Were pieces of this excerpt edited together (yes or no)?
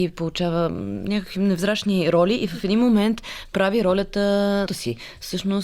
yes